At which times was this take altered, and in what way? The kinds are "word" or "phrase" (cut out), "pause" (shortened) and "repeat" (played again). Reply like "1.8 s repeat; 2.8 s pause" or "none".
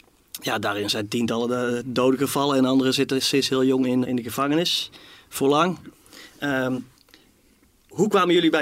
4.0 s word